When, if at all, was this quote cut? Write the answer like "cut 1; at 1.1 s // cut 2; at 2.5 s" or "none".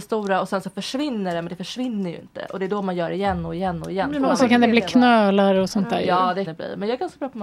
cut 1; at 6.5 s